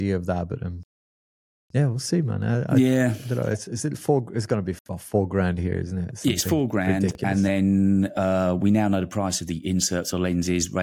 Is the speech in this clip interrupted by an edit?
no; 0 cuts

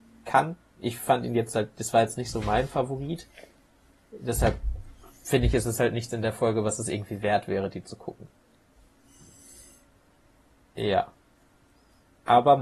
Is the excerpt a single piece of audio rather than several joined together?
yes; 0 cuts

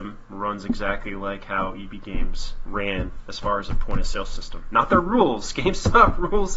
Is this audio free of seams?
yes; 0 cuts

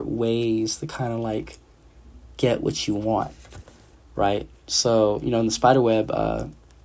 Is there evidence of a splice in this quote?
no; 0 cuts

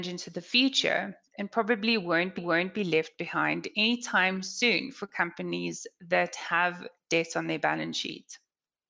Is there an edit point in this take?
yes; 1 cut; at 2.4 s

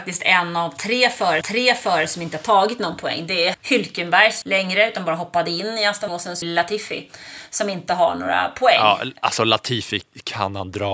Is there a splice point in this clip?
yes; 5 cuts; at 1.4 s, 3.5 s, 4.4 s, 6.1 s, 6.4 s

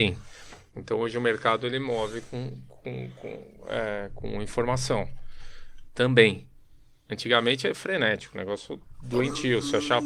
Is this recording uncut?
yes; 0 cuts

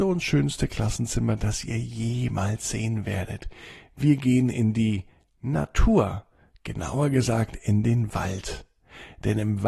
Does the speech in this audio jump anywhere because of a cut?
no; 0 cuts

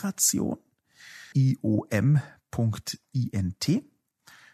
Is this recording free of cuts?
no; 1 cut; at 1.3 s

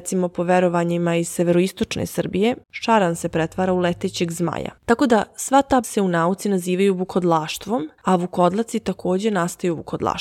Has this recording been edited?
yes; 4 cuts; at 2.6 s, 4.8 s, 5.8 s, 8.0 s

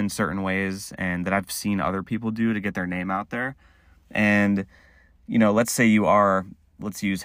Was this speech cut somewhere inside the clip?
no; 0 cuts

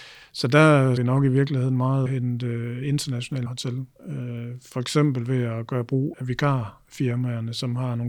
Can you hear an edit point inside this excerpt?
yes; 5 cuts; at 1.0 s, 2.1 s, 3.5 s, 3.9 s, 6.1 s

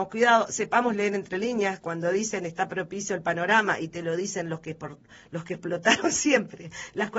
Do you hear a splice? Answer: no; 0 cuts

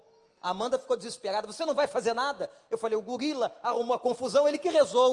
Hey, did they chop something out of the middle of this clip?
no; 0 cuts

